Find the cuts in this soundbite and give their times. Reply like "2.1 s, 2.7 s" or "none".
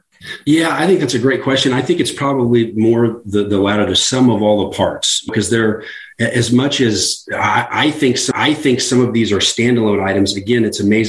5.3 s, 8.3 s